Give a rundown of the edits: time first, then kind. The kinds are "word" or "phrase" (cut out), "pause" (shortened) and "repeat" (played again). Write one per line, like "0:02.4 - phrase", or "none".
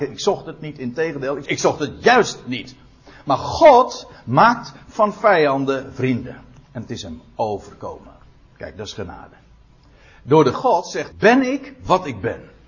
0:01.4 - word
0:10.5 - word
0:11.1 - word